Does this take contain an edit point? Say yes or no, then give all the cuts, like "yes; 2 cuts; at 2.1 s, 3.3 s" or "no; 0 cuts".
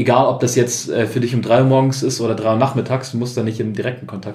no; 0 cuts